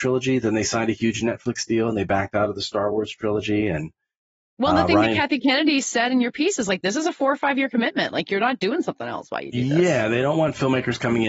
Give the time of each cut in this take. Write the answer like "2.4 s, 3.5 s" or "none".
none